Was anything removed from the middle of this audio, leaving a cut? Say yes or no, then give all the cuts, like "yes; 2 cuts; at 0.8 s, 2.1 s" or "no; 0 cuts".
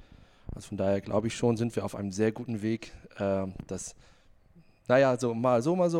no; 0 cuts